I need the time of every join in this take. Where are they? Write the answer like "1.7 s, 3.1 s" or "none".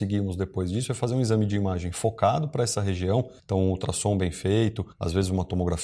3.4 s, 4.9 s